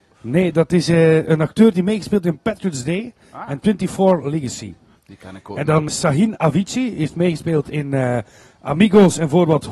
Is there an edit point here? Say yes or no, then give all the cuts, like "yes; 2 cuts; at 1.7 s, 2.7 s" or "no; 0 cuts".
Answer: yes; 1 cut; at 5.9 s